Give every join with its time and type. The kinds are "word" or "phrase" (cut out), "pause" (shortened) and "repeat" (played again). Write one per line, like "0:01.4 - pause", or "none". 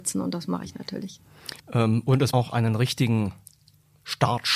0:01.6 - pause
0:02.3 - word